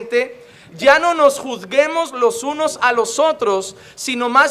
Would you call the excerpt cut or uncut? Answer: uncut